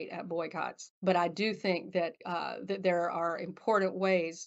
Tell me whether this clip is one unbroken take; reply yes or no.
no